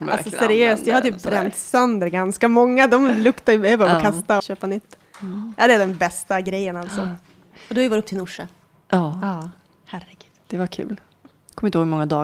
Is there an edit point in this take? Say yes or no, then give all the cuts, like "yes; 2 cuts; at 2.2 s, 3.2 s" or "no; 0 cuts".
yes; 1 cut; at 4.4 s